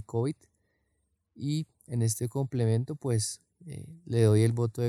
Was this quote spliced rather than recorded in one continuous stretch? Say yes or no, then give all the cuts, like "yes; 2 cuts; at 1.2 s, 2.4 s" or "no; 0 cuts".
no; 0 cuts